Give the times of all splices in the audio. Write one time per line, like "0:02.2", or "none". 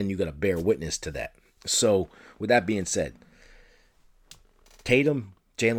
none